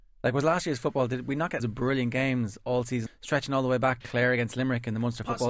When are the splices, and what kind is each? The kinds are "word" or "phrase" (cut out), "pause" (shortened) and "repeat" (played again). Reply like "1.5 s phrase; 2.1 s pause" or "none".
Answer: 1.6 s word; 3.1 s word; 4.0 s word